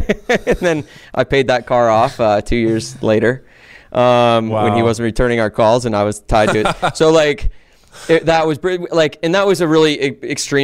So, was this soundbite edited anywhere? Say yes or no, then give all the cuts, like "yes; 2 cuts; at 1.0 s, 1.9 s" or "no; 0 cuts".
no; 0 cuts